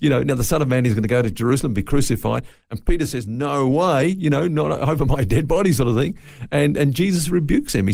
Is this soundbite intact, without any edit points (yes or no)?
yes